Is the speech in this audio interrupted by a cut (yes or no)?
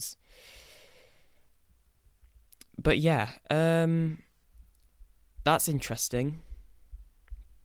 no